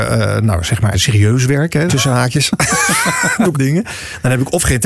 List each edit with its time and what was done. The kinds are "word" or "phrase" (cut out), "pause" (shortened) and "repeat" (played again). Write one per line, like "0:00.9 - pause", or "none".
0:00.9 - word
0:01.9 - word
0:03.5 - word